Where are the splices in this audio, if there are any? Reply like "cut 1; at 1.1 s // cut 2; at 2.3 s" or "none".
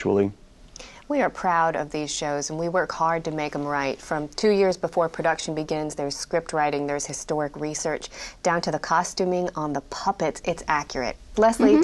none